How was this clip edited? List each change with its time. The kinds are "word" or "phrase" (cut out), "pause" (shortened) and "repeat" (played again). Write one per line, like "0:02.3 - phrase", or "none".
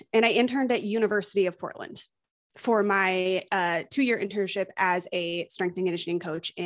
none